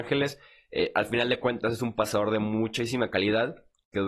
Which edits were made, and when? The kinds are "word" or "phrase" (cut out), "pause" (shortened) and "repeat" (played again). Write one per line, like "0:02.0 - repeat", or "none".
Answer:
none

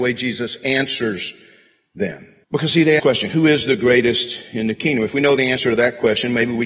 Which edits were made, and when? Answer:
0:02.4 - pause
0:03.0 - phrase

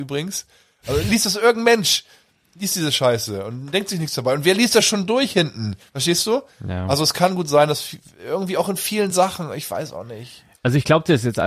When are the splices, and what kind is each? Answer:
none

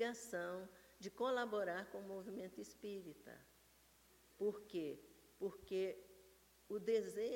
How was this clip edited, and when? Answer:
none

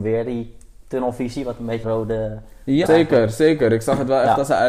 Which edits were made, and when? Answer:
0:01.8 - word
0:02.9 - word

